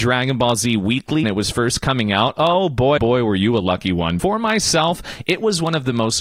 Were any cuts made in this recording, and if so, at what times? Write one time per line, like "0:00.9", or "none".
0:01.2
0:03.0
0:04.2